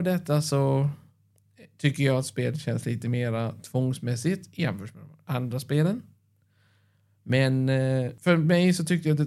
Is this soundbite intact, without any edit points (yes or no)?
yes